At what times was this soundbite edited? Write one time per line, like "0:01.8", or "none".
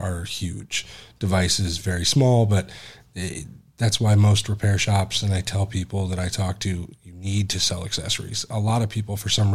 none

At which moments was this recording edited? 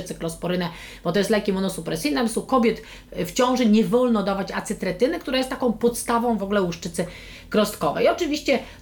0:06.4

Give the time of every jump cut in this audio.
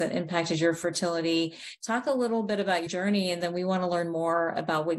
0:02.9

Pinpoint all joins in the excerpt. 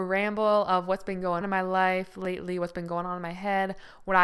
0:01.4

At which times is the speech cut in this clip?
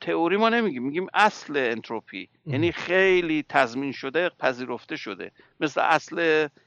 0:02.4

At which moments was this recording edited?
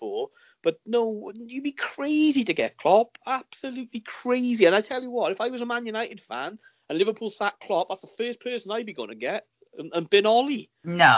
none

